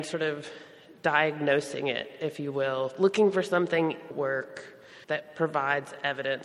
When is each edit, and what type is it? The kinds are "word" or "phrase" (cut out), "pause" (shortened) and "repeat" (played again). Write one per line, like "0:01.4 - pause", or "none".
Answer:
0:04.1 - phrase
0:05.0 - pause

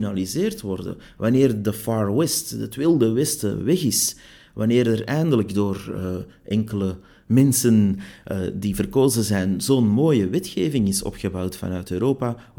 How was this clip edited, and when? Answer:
none

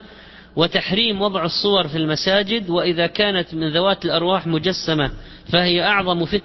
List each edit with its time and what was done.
none

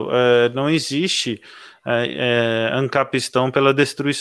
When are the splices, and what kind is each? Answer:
none

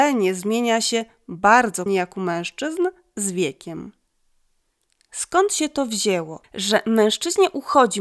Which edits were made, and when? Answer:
0:01.9 - word
0:06.4 - pause

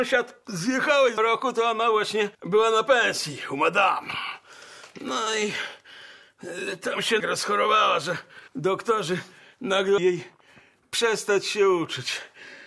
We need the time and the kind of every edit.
0:01.2 - word
0:02.3 - pause
0:07.2 - phrase
0:08.5 - pause
0:10.0 - word

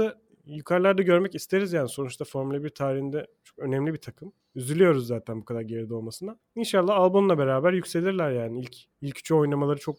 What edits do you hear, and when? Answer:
none

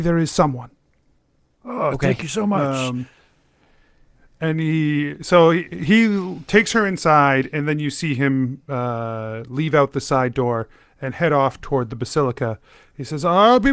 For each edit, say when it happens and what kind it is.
none

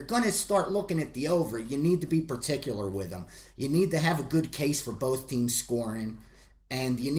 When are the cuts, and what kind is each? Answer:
none

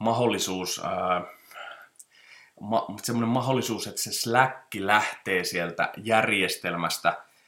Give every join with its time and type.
none

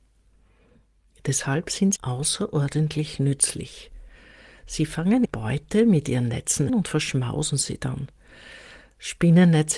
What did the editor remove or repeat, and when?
0:02.0 - word
0:05.2 - word
0:06.7 - word

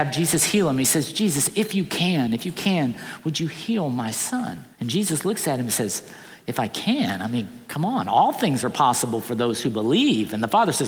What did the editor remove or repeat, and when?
0:04.7 - pause
0:06.4 - phrase

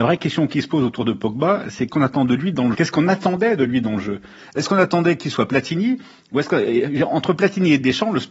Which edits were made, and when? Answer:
0:01.9 - word
0:02.7 - word

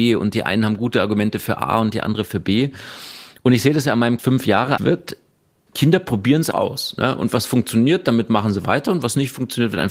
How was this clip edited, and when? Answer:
0:04.2 - phrase
0:04.8 - phrase
0:06.5 - word

